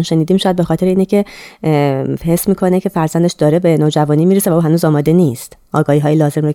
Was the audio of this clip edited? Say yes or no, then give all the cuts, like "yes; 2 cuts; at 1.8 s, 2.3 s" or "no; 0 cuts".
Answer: no; 0 cuts